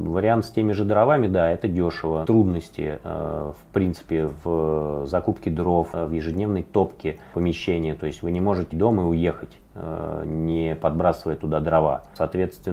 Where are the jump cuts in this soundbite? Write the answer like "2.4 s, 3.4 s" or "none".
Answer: 2.2 s, 8.7 s